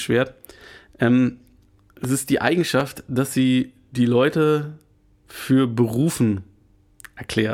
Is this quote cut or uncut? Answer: uncut